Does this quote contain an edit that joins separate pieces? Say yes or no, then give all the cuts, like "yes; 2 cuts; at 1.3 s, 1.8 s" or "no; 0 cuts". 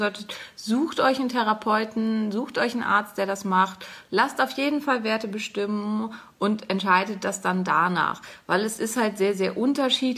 no; 0 cuts